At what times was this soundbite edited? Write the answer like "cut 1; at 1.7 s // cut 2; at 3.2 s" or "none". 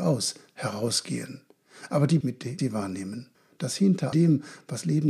cut 1; at 2.2 s // cut 2; at 2.6 s // cut 3; at 3.3 s // cut 4; at 4.1 s